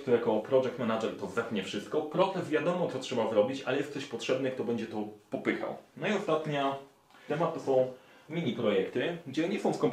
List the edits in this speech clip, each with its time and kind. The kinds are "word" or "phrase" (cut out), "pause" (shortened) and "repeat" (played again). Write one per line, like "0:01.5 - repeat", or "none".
0:07.3 - word
0:08.3 - word